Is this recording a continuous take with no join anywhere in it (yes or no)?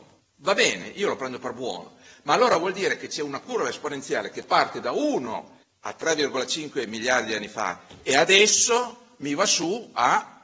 yes